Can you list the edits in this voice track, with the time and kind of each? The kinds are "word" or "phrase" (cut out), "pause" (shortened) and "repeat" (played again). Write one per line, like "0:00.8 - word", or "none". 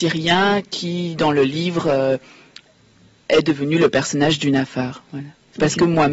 none